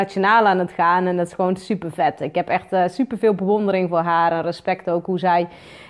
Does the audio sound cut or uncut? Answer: uncut